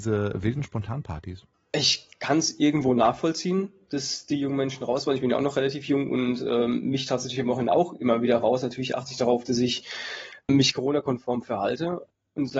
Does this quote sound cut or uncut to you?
uncut